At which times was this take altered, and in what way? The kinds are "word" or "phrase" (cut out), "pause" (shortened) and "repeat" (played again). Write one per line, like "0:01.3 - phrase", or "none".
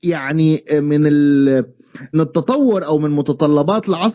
0:02.1 - word